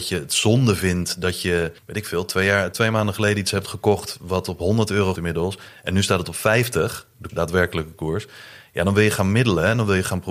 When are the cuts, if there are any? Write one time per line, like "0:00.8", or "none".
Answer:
0:01.8
0:02.7
0:05.1
0:07.3